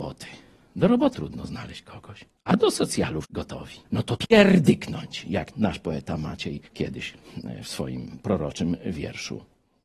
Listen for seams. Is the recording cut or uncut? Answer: cut